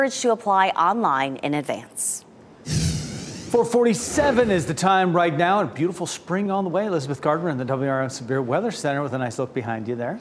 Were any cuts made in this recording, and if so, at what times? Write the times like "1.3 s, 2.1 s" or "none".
6.5 s